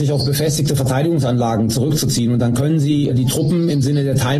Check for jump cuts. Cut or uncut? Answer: cut